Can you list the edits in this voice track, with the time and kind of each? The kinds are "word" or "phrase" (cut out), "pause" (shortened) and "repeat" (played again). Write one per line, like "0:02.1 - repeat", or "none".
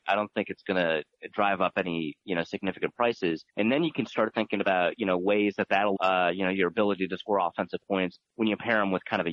0:03.5 - pause
0:06.0 - word
0:08.2 - pause